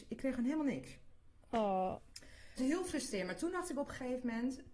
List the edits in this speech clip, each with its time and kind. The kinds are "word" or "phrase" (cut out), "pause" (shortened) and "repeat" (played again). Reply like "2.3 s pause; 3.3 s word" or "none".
2.6 s word